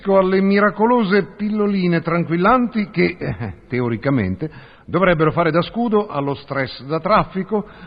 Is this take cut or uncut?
uncut